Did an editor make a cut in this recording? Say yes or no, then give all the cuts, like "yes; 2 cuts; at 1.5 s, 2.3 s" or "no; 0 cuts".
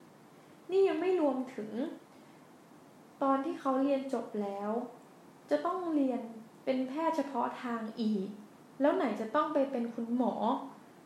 no; 0 cuts